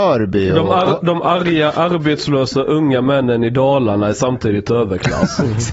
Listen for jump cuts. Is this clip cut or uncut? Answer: uncut